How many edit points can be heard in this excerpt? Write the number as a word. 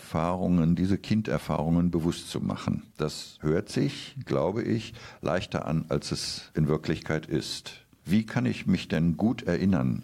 zero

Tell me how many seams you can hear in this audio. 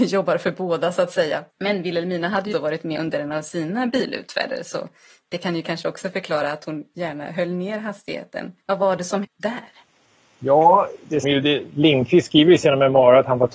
six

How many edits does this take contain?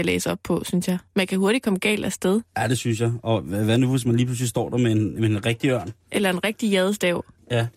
one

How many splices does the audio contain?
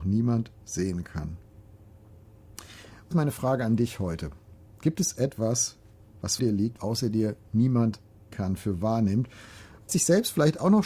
five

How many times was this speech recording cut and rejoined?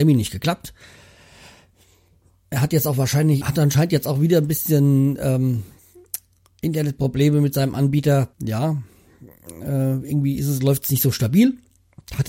two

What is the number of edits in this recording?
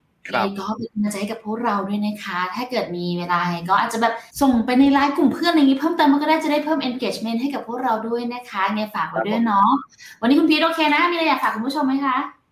one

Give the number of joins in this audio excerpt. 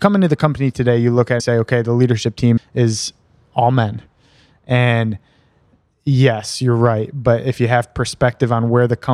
two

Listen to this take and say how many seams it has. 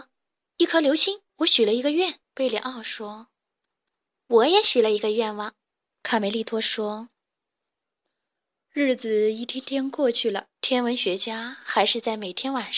five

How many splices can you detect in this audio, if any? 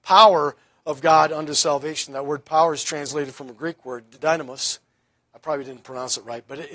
one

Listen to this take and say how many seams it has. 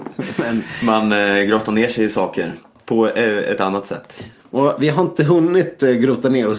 zero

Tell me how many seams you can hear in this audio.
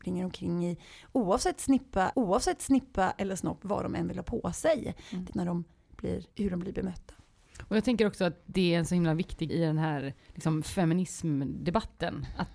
five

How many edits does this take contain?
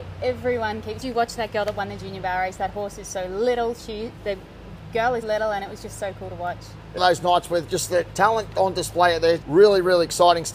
four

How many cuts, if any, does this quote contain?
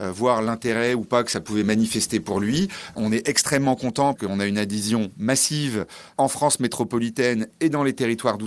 one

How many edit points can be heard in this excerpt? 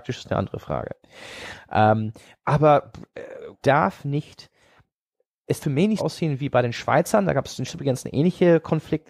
four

